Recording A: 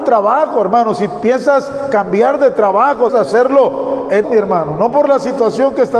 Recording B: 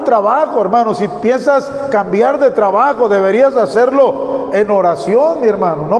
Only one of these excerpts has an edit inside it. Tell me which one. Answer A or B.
A